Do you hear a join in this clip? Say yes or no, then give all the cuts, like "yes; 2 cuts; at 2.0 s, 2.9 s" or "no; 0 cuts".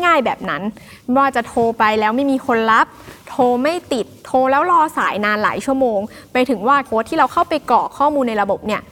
yes; 1 cut; at 6.8 s